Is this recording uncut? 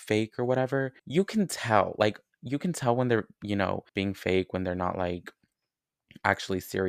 no; 2 cuts; at 1.0 s, 3.9 s

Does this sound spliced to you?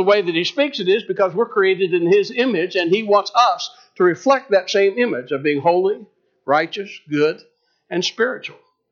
no; 0 cuts

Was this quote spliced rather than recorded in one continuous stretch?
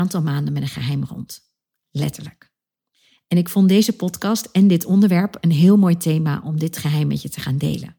no; 0 cuts

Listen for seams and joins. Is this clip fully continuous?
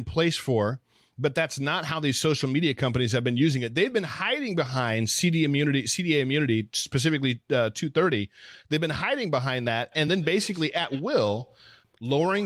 yes; 0 cuts

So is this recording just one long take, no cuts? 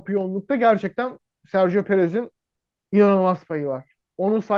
yes; 0 cuts

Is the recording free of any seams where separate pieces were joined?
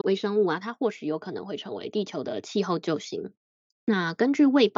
yes; 0 cuts

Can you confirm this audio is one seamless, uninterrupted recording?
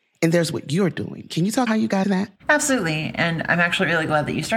no; 3 cuts; at 1.7 s, 2.0 s, 2.4 s

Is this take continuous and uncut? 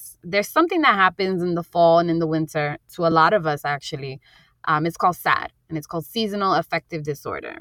yes; 0 cuts

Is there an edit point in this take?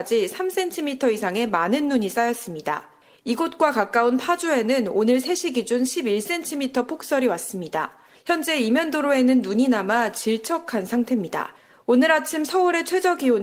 no; 0 cuts

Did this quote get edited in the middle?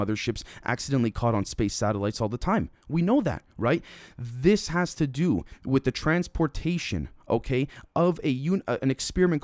no; 0 cuts

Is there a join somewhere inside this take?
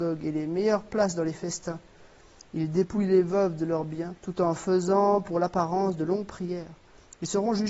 yes; 1 cut; at 4.2 s

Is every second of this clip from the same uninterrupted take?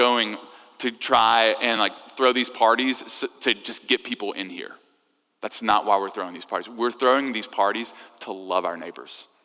yes; 0 cuts

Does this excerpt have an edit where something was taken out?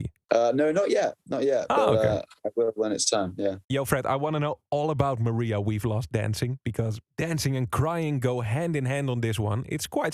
yes; 1 cut; at 3.6 s

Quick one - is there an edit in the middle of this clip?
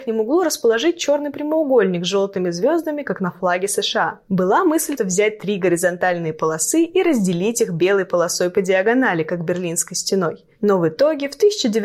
yes; 1 cut; at 5.0 s

